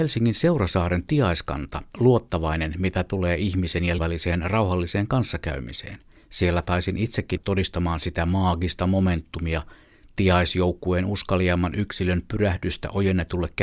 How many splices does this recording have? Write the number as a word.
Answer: four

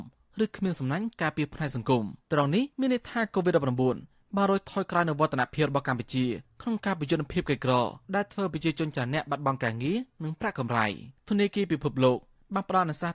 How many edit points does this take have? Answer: four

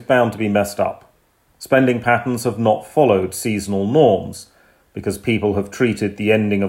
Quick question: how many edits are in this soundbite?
zero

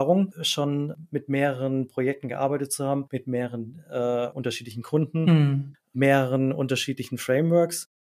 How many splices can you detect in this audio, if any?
zero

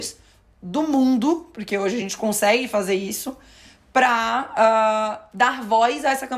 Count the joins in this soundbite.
zero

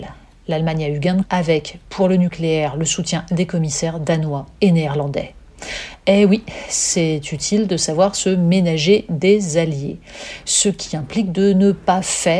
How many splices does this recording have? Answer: two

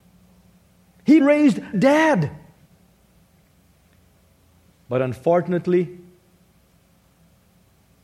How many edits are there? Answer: two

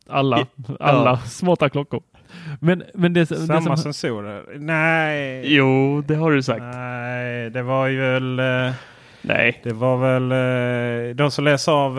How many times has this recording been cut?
zero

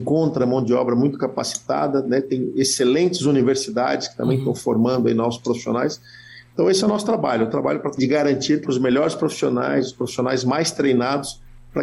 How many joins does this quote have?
two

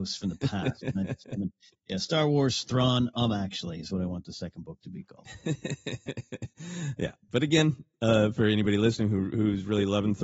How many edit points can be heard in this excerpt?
zero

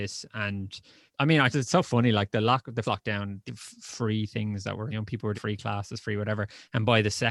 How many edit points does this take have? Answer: six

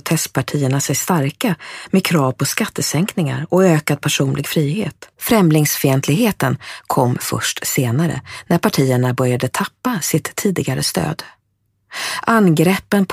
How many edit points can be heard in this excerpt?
one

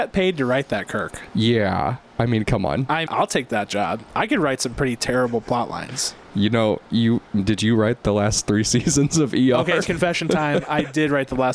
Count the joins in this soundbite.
two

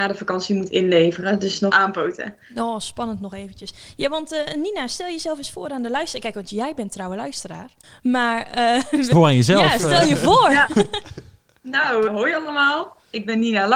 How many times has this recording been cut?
four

